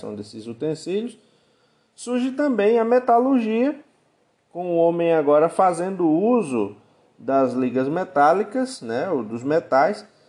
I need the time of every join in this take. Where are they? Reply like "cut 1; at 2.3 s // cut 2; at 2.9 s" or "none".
none